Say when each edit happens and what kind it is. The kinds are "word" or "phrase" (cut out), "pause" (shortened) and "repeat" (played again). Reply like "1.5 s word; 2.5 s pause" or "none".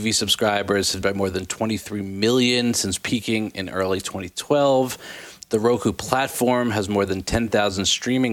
1.0 s word